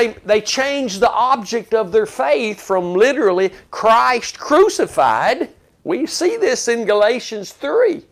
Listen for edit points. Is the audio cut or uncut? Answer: uncut